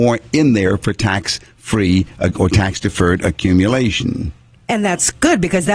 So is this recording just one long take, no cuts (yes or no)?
yes